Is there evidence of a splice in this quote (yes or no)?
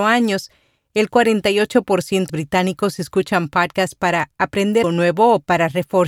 yes